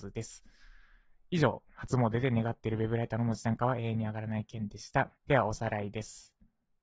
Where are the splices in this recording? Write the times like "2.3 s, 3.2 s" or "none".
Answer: 5.2 s